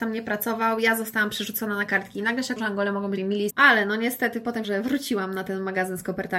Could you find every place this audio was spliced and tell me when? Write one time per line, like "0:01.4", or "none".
0:02.6
0:03.2
0:03.5
0:04.6